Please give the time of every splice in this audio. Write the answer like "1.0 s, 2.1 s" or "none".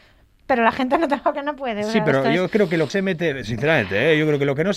1.3 s, 2.9 s